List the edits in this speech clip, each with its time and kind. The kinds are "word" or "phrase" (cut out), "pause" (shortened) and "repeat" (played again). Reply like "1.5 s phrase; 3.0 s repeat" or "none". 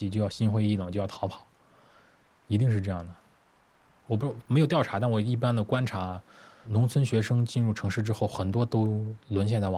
none

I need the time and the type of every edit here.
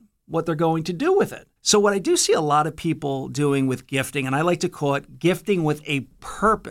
1.6 s pause

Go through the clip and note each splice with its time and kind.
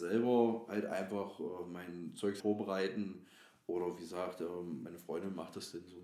2.4 s word

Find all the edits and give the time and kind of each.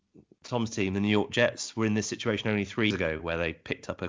2.9 s word

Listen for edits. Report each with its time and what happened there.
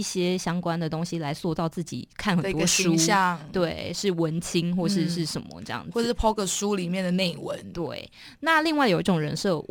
none

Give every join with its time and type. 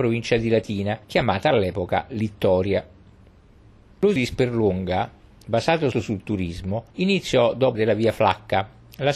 1.0 s pause; 4.2 s word; 5.9 s word; 6.9 s pause; 7.7 s word

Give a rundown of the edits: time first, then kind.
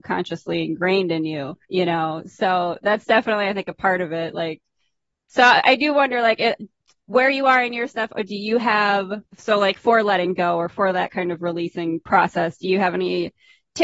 1.6 s pause; 9.3 s pause

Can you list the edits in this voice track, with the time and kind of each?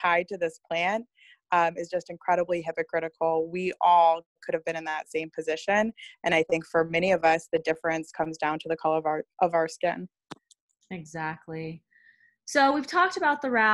none

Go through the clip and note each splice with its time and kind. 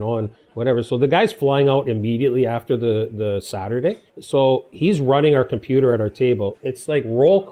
4.1 s pause

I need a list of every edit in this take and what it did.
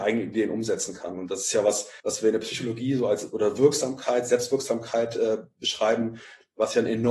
2.0 s pause

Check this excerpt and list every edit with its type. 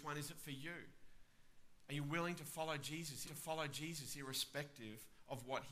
3.3 s repeat

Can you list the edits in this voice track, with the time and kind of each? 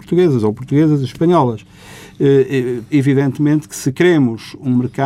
2.9 s word

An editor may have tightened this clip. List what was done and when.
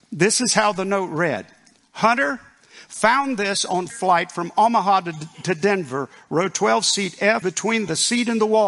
3.9 s word; 7.4 s word

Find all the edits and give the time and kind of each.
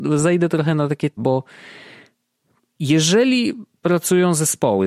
1.2 s word

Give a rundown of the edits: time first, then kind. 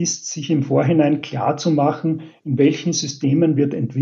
none

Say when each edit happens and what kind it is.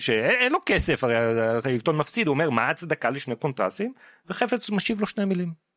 none

